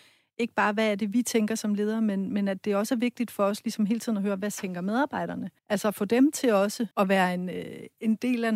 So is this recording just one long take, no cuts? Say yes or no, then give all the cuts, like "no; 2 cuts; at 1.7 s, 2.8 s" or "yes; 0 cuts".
no; 2 cuts; at 5.6 s, 6.9 s